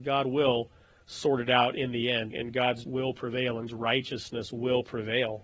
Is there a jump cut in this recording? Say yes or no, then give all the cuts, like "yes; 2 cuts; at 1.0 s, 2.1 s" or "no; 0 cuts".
yes; 3 cuts; at 2.3 s, 2.8 s, 3.7 s